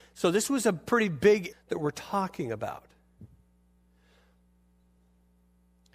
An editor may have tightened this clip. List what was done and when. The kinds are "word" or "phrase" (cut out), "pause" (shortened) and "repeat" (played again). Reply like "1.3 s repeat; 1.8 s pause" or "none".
1.5 s word